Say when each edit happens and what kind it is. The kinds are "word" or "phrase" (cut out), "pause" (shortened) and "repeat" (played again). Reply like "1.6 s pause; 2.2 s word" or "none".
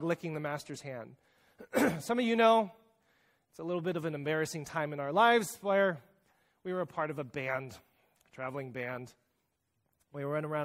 none